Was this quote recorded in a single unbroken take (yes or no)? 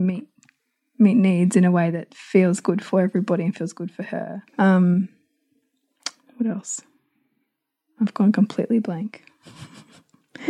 no